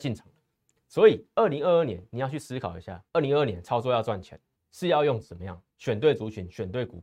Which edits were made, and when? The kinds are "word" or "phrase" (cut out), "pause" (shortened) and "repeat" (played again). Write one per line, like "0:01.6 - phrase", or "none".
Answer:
0:03.1 - pause
0:04.6 - pause
0:05.7 - pause